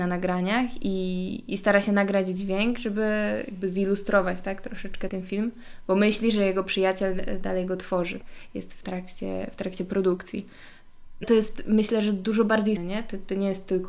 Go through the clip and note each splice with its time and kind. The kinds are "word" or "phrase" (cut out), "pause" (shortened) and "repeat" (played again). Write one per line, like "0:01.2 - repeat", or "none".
0:05.1 - word
0:11.2 - word
0:12.8 - word